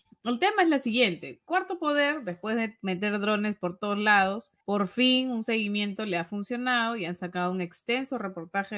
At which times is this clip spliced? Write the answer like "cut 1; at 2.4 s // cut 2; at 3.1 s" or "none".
cut 1; at 4.6 s